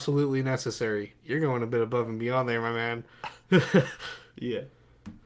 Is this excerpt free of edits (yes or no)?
no